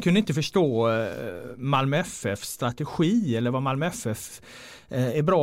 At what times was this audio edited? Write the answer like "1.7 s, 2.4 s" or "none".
none

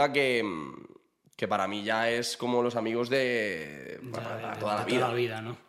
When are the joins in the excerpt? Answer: none

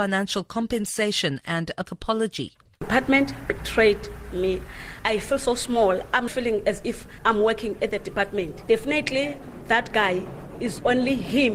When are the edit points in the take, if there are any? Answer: 1.9 s, 2.6 s, 6.3 s

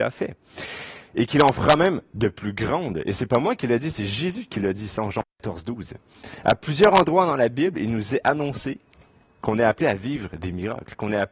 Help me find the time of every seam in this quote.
none

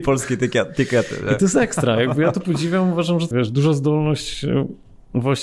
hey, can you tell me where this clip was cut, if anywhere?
3.3 s

